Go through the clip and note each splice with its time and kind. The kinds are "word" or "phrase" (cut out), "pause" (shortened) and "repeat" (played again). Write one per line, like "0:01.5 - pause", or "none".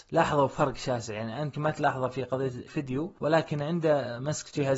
0:01.5 - word
0:02.7 - phrase